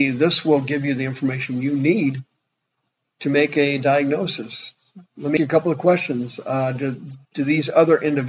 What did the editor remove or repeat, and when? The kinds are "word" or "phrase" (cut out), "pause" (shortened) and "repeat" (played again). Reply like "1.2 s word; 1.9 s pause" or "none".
5.1 s pause; 5.4 s word; 7.2 s pause

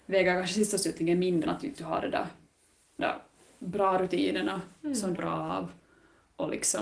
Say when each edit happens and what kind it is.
1.4 s word; 1.7 s word; 3.0 s word; 5.2 s word

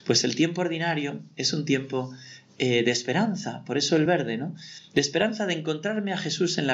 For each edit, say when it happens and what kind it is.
none

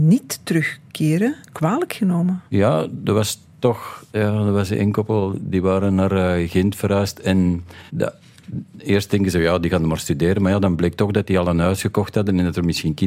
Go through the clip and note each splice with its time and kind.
1.4 s pause; 2.5 s pause; 4.1 s pause; 7.9 s pause

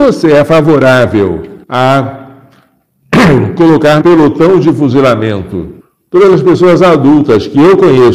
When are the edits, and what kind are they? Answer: 1.6 s pause; 4.0 s word; 5.8 s pause

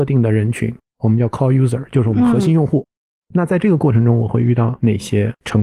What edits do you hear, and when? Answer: none

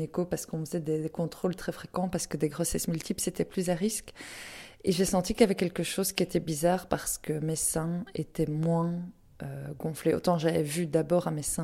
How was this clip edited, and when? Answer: none

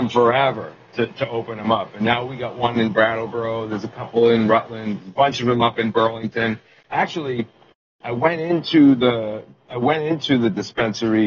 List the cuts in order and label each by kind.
none

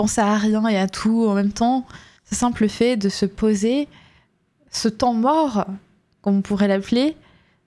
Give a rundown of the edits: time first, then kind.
2.2 s pause

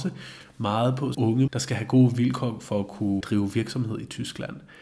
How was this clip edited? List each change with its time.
1.1 s word; 1.5 s phrase; 3.2 s word

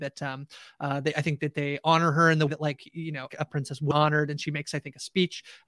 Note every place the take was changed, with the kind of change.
2.5 s word; 3.3 s word; 3.9 s phrase

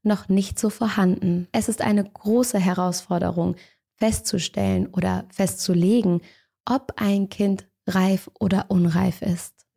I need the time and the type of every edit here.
none

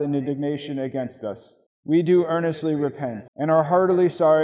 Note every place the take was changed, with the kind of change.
1.7 s pause; 3.3 s pause

